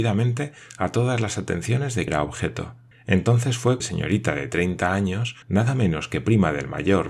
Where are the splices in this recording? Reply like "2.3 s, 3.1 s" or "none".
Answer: 2.1 s, 2.9 s, 3.8 s, 5.4 s